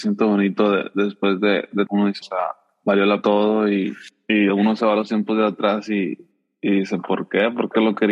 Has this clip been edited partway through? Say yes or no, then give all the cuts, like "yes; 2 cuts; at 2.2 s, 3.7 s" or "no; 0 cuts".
yes; 4 cuts; at 1.9 s, 2.2 s, 3.2 s, 4.5 s